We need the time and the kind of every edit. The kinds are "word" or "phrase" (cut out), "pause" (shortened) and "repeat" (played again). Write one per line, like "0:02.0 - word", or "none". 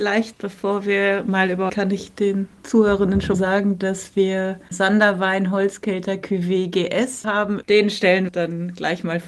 0:01.7 - phrase
0:03.3 - word
0:04.7 - word
0:07.2 - word
0:08.3 - word

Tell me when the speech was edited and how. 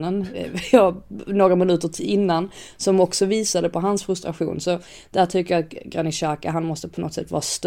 none

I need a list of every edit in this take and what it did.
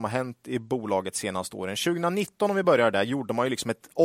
none

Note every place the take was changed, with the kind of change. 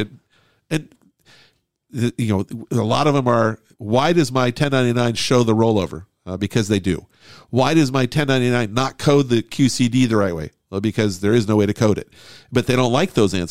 none

